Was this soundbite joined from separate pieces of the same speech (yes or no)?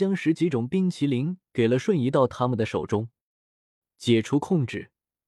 no